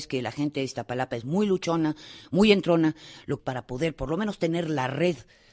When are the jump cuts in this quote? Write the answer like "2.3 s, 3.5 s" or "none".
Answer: 3.4 s